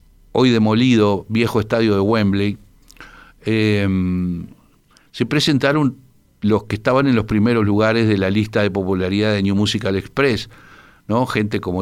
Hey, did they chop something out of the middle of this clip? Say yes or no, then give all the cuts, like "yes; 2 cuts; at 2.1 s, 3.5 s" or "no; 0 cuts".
no; 0 cuts